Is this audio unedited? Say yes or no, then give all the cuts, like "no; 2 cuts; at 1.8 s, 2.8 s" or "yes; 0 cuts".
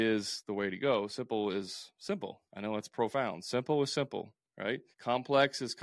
no; 2 cuts; at 2.5 s, 4.9 s